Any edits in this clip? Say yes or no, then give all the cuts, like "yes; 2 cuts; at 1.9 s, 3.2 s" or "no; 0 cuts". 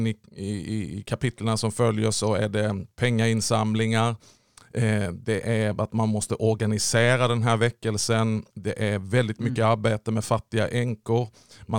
yes; 1 cut; at 8.5 s